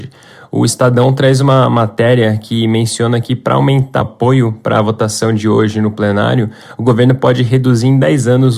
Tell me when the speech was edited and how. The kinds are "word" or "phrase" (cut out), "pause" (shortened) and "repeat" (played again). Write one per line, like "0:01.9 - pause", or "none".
0:04.0 - word